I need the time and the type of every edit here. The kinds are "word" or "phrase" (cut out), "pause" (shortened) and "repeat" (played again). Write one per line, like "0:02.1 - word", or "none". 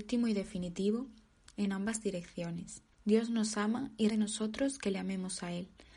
0:02.9 - pause
0:04.1 - word